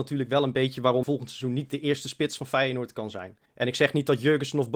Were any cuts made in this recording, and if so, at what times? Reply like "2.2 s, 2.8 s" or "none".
1.0 s, 3.5 s